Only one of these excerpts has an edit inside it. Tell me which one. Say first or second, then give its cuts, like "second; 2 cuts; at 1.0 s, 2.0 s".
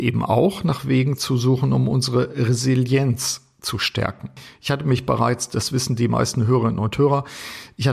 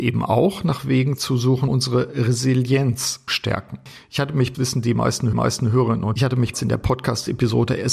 second; 6 cuts; at 1.7 s, 3.3 s, 4.5 s, 5.3 s, 6.2 s, 6.5 s